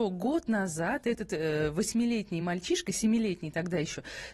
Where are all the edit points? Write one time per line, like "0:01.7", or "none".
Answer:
none